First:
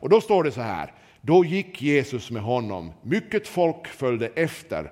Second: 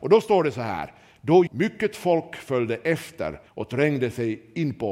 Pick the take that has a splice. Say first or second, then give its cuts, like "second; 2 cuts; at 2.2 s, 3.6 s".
second; 2 cuts; at 1.5 s, 3.5 s